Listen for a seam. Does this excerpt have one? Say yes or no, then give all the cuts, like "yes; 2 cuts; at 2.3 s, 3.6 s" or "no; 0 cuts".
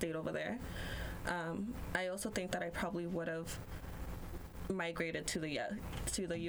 no; 0 cuts